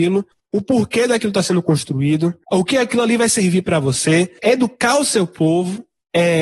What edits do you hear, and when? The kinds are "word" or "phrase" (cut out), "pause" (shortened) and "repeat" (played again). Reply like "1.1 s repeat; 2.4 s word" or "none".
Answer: none